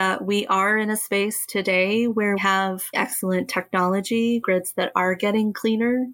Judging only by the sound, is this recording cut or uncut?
cut